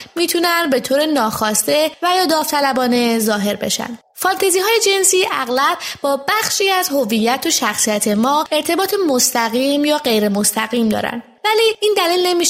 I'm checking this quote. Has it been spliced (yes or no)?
no